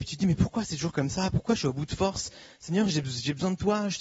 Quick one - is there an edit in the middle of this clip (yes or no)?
no